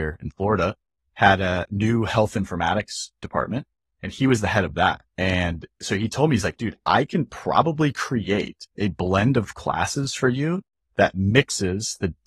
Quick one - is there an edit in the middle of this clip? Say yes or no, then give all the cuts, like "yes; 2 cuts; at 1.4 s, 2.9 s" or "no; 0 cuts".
yes; 2 cuts; at 5.1 s, 8.7 s